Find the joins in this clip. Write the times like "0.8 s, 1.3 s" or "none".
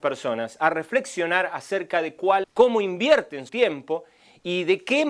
2.4 s, 3.5 s